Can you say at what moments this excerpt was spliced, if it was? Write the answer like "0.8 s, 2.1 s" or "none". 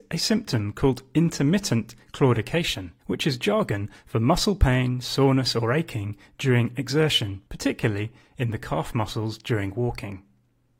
3.0 s, 7.5 s